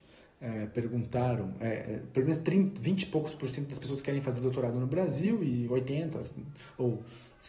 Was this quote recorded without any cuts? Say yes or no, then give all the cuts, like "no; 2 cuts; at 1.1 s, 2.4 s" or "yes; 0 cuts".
yes; 0 cuts